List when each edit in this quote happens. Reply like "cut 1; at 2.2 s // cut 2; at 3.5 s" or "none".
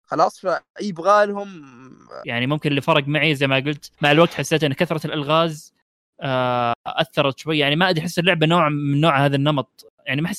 cut 1; at 3.9 s